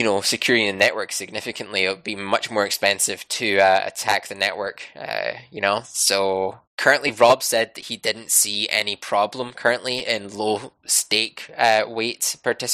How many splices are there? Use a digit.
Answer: 1